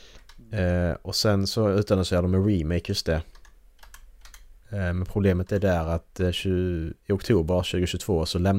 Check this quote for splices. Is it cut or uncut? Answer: uncut